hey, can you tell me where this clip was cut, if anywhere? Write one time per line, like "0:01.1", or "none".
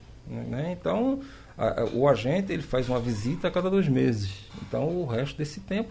0:04.5